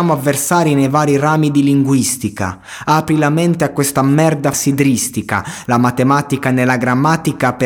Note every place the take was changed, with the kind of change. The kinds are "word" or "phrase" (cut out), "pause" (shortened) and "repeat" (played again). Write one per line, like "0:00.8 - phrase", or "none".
0:04.5 - word